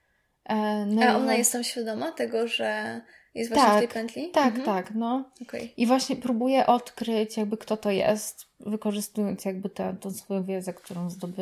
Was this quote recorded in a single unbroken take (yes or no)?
yes